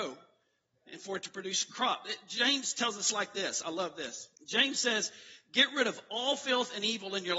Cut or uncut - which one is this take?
cut